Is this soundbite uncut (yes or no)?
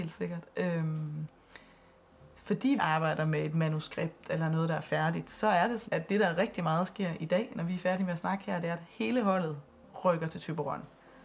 no